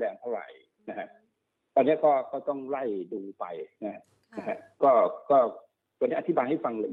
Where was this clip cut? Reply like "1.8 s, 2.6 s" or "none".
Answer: none